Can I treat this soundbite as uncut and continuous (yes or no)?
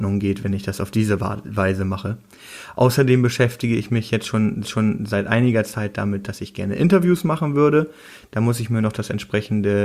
no